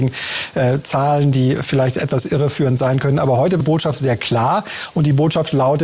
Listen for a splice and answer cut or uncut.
cut